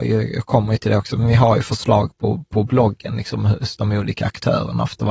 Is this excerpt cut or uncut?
uncut